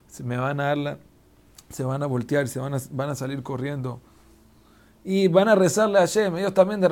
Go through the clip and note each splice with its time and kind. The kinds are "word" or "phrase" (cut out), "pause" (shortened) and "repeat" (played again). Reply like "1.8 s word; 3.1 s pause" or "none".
none